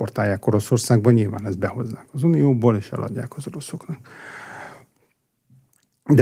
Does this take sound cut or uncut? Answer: uncut